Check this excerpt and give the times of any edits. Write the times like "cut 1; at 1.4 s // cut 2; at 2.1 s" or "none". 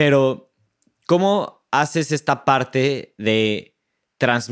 none